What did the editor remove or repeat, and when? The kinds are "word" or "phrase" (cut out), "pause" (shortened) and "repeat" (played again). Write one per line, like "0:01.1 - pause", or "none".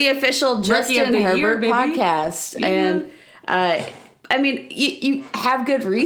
none